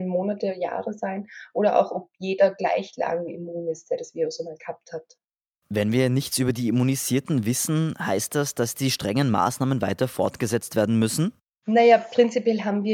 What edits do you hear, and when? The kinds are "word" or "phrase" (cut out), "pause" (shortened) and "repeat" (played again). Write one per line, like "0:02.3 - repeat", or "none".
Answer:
none